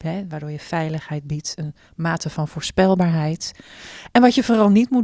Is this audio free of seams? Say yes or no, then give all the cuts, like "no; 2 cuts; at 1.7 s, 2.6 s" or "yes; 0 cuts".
yes; 0 cuts